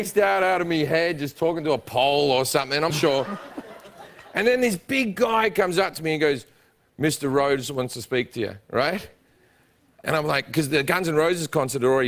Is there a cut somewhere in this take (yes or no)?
yes